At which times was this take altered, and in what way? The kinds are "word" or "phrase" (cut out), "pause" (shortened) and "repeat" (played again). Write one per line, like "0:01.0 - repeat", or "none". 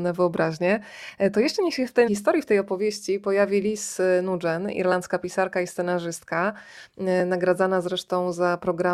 0:02.1 - word

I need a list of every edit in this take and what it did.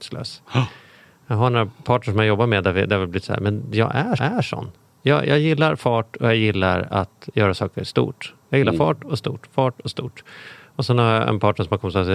0:03.2 - phrase
0:04.2 - repeat

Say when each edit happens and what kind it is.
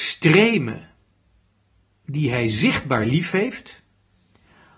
none

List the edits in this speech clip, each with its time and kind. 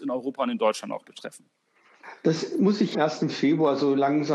0:02.9 - phrase

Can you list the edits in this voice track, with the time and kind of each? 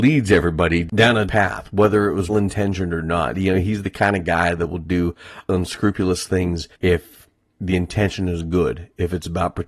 0:01.3 - word
0:02.3 - word
0:06.7 - pause

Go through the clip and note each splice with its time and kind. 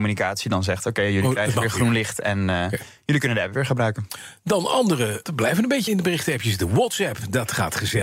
0:05.3 - phrase
0:05.9 - word

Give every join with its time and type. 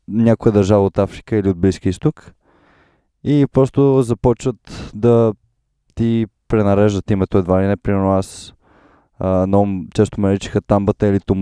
none

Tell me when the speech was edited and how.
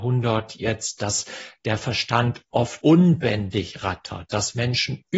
0:02.8 - word

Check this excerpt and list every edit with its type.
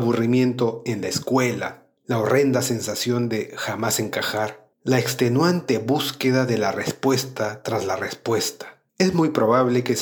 0:02.0 - pause
0:04.7 - pause
0:08.9 - pause

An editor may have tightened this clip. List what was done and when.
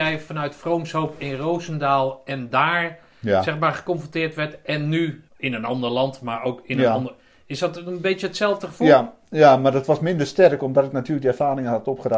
0:05.3 - pause

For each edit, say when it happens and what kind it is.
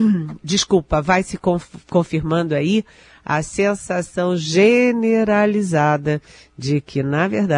none

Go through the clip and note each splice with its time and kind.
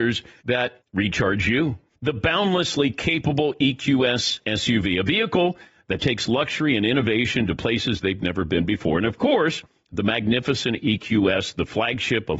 none

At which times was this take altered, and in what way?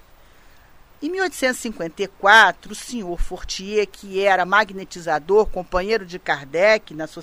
none

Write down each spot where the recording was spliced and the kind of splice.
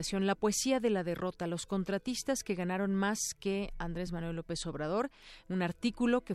none

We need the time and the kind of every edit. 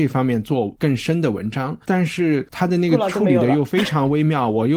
0:01.8 - word

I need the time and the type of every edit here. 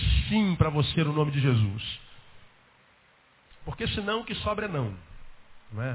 none

